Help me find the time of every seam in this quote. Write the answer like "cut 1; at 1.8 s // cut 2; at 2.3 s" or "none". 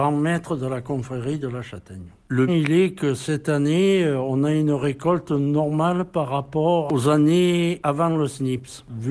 cut 1; at 2.5 s